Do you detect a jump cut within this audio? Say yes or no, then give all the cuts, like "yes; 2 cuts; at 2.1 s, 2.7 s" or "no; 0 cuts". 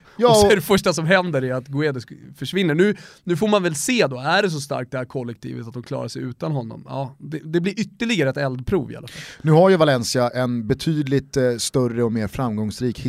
no; 0 cuts